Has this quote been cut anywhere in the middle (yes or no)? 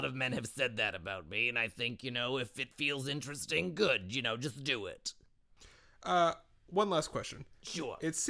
no